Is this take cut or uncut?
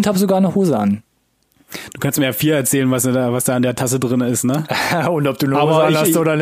uncut